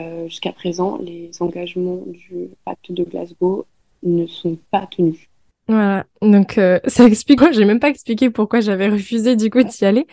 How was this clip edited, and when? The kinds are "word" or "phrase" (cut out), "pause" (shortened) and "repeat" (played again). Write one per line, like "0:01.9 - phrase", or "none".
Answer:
0:02.5 - word
0:07.4 - word

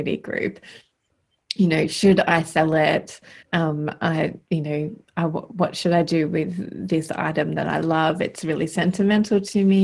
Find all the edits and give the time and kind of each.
0:03.4 - pause

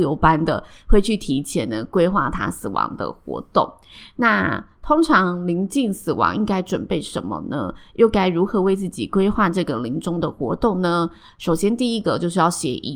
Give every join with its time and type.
none

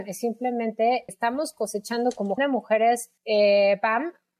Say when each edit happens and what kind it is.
0:01.1 - word
0:02.4 - word
0:03.2 - pause

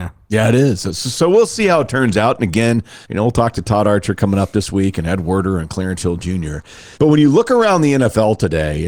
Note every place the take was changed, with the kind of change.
0:03.0 - pause
0:06.9 - pause

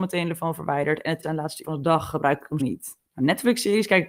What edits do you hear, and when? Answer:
0:01.2 - word
0:01.6 - word
0:02.6 - word
0:03.0 - pause

